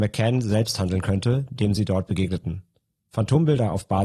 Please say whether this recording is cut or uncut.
uncut